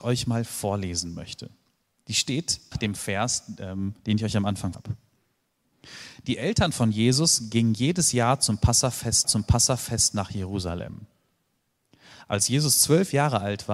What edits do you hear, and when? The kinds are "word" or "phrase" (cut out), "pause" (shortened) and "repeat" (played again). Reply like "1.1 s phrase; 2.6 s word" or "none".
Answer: 2.7 s phrase; 4.0 s pause; 4.7 s word; 9.2 s repeat